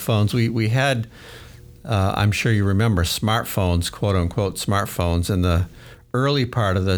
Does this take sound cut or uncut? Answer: uncut